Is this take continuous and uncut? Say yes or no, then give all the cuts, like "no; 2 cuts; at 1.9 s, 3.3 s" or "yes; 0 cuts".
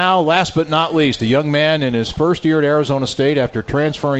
yes; 0 cuts